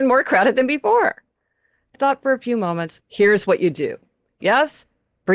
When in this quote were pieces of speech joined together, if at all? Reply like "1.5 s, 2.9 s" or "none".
1.9 s, 3.0 s, 4.4 s

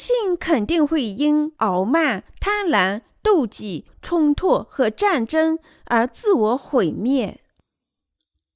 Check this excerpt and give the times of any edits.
1.6 s, 3.9 s

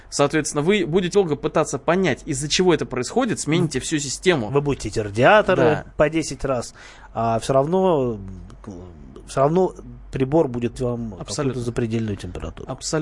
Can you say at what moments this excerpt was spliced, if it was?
1.1 s, 4.8 s, 10.7 s

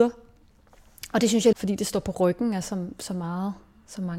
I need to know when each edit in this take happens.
1.5 s

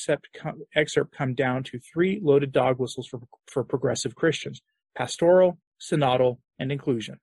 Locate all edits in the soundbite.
none

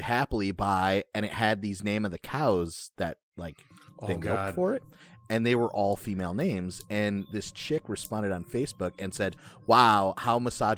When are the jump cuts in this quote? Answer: none

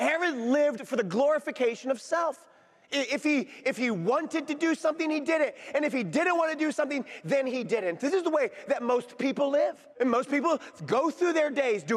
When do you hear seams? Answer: 9.9 s

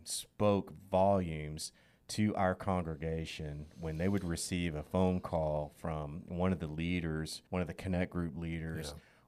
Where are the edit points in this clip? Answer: 7.5 s

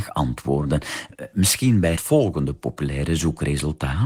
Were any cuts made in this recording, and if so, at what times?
2.0 s

